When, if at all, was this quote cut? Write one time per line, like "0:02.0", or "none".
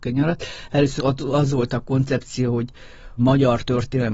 0:01.0
0:03.2

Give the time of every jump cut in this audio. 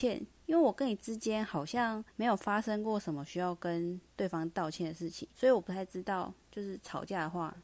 0:02.1
0:05.3

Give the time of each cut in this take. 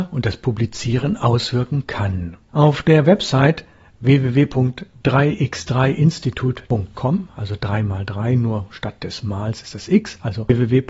none

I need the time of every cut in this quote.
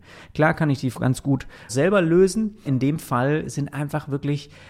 0:00.9
0:01.7
0:02.6

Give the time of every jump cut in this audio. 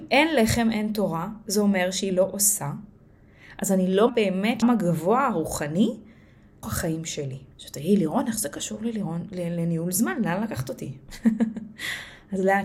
0:02.1
0:04.1
0:04.6
0:06.6
0:07.5

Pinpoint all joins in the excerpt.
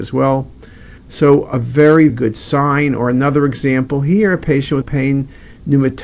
0:01.0
0:02.1
0:04.8

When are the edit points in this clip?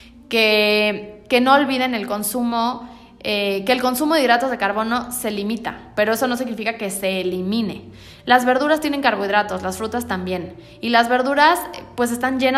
none

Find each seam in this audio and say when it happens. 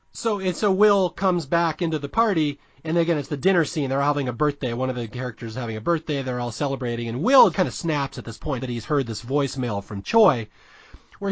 0:07.5
0:08.6

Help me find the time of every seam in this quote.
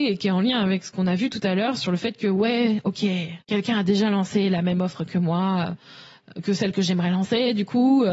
0:03.4

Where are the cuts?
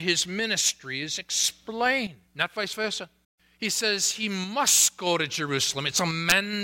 0:02.3
0:03.2

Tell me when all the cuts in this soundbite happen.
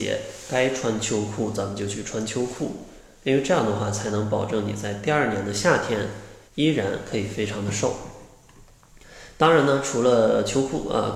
0:06.5

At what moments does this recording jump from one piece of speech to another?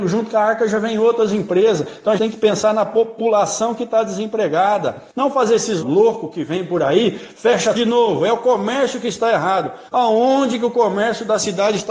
0:02.2
0:05.1
0:05.8
0:07.7
0:09.9

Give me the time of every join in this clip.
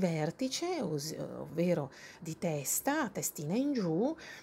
0:02.2

